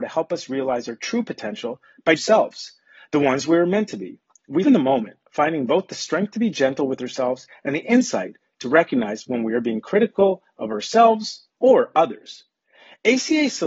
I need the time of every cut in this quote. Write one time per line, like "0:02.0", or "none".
0:02.2
0:04.6
0:11.5